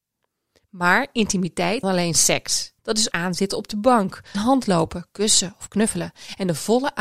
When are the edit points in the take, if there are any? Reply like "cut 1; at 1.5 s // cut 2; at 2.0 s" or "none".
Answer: cut 1; at 1.8 s // cut 2; at 2.8 s // cut 3; at 3.1 s // cut 4; at 4.3 s